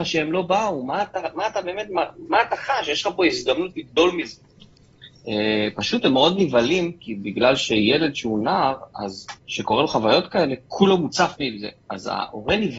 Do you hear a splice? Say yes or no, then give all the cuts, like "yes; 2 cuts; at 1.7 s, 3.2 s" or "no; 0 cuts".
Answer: yes; 1 cut; at 9.4 s